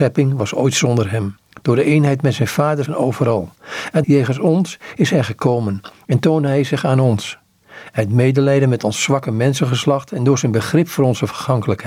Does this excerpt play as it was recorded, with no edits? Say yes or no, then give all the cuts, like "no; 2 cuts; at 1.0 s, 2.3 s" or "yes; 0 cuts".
no; 2 cuts; at 2.9 s, 4.0 s